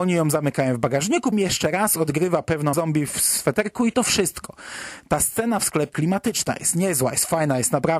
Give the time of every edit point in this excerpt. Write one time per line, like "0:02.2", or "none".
0:01.3
0:02.7
0:03.4
0:05.9